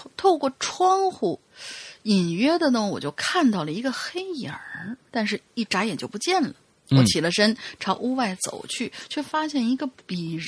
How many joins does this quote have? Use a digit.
1